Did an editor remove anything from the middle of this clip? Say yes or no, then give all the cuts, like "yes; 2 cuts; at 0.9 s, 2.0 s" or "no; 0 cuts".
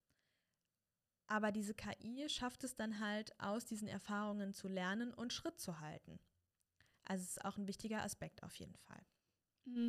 no; 0 cuts